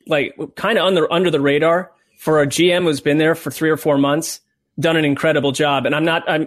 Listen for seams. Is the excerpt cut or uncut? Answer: uncut